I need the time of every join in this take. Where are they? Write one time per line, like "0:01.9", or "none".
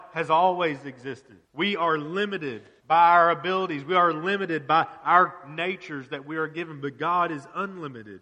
0:01.4
0:02.8